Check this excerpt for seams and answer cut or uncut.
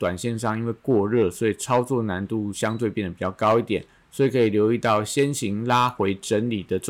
uncut